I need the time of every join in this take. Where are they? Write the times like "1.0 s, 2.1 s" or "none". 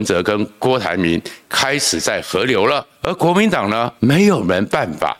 2.9 s, 4.0 s